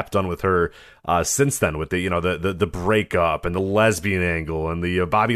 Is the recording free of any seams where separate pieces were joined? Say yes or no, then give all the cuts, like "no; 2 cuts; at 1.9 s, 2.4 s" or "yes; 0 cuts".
yes; 0 cuts